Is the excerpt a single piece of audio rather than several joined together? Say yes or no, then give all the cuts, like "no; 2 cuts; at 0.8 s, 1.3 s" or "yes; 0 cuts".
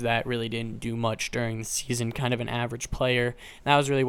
yes; 0 cuts